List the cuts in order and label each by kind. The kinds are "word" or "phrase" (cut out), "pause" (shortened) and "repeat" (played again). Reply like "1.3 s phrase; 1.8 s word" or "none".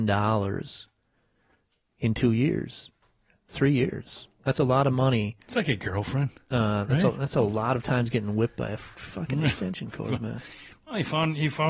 none